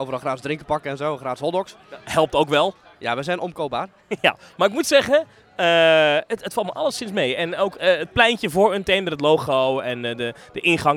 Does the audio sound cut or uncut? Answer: uncut